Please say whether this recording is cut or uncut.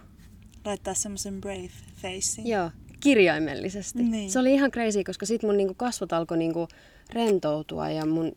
uncut